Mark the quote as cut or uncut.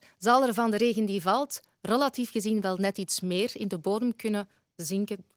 uncut